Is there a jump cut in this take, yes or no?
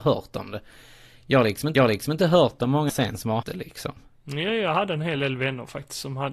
yes